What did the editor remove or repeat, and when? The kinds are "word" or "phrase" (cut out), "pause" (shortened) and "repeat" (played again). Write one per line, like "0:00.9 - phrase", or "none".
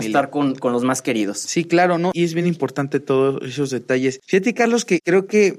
none